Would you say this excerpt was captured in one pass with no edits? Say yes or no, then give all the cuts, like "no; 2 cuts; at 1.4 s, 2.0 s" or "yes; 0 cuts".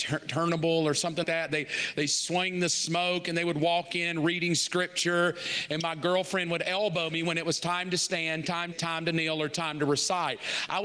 no; 2 cuts; at 1.2 s, 8.7 s